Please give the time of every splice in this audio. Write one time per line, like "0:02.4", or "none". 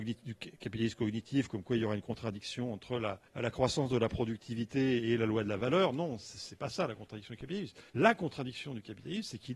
0:03.3
0:07.9